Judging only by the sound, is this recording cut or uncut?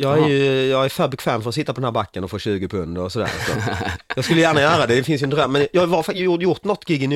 uncut